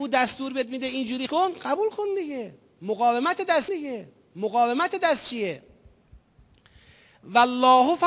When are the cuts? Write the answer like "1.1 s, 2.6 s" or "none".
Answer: 1.3 s, 3.7 s